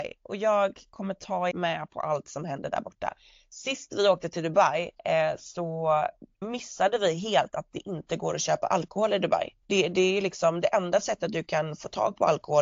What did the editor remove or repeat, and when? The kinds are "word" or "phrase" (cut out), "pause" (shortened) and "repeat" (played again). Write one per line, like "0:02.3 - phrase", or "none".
0:01.5 - word
0:05.0 - pause
0:06.4 - word
0:09.6 - pause